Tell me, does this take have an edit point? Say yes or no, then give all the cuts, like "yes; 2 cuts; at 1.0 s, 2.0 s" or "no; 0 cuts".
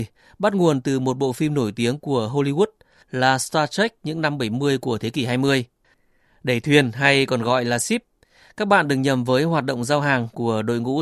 no; 0 cuts